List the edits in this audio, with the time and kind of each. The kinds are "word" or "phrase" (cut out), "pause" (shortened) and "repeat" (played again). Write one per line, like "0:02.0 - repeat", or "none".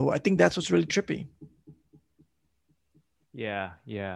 none